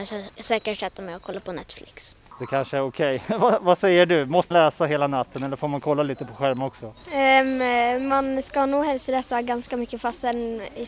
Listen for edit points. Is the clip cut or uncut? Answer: cut